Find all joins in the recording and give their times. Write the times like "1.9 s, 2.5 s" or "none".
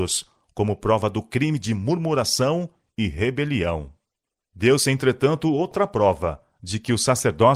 none